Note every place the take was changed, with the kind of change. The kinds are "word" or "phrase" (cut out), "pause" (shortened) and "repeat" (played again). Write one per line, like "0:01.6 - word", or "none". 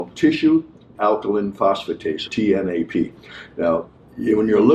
0:00.9 - word
0:02.3 - word